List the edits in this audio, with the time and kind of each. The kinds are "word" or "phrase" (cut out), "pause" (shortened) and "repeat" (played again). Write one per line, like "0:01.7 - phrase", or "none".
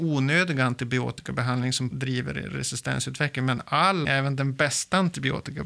0:01.9 - word
0:04.0 - word